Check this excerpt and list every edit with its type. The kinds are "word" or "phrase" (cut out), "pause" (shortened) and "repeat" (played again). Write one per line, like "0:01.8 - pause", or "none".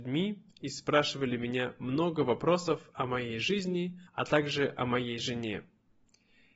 0:04.1 - pause